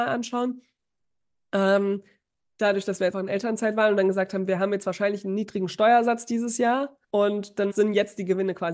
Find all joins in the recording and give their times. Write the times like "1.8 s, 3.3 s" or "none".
3.1 s, 7.0 s, 7.7 s